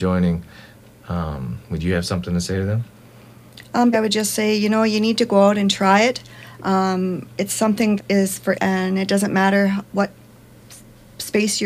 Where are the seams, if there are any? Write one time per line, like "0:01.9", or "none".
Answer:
0:03.9
0:07.3
0:08.0
0:08.5